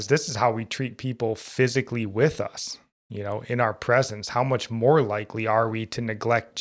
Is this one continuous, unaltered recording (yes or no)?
yes